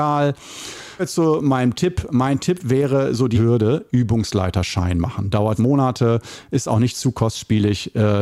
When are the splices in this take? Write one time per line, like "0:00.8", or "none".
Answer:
0:01.0
0:03.3
0:05.6